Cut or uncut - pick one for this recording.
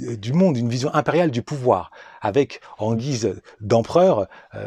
uncut